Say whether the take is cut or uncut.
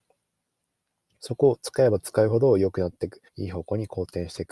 cut